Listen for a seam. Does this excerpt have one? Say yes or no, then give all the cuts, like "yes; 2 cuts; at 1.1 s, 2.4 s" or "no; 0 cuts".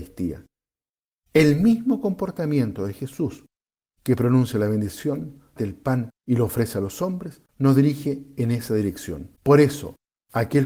yes; 4 cuts; at 5.6 s, 6.2 s, 7.5 s, 9.4 s